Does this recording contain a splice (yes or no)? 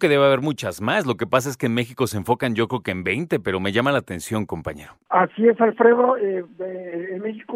no